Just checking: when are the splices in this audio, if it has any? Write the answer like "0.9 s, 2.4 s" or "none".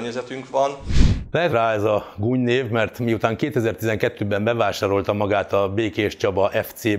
1.5 s